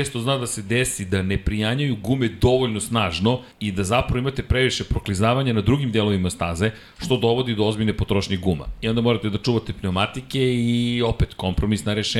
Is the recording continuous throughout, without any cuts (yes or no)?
no